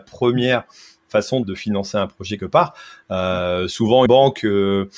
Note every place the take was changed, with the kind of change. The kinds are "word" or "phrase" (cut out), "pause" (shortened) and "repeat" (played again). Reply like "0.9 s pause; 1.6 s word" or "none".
1.4 s word; 2.4 s word; 4.1 s word